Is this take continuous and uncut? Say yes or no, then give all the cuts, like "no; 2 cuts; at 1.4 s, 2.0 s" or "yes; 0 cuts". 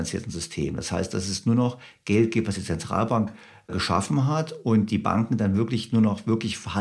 yes; 0 cuts